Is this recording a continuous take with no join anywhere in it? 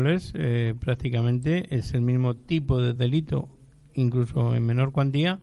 yes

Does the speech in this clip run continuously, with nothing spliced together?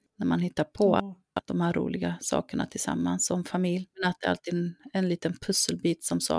no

